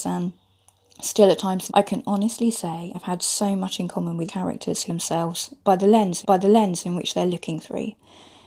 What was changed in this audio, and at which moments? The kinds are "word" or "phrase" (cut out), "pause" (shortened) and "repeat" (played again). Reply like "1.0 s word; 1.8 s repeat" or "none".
1.7 s word; 2.9 s word; 4.3 s word; 4.9 s word; 6.2 s repeat